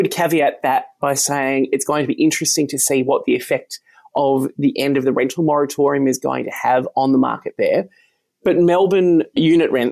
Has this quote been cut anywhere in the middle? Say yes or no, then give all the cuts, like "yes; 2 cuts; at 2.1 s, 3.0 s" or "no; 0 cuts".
no; 0 cuts